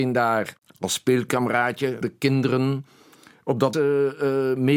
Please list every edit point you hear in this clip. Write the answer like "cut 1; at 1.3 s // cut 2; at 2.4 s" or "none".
cut 1; at 2.0 s // cut 2; at 3.7 s